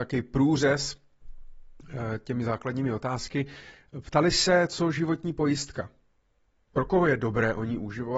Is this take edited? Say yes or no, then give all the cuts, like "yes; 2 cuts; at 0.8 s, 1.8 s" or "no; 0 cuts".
no; 0 cuts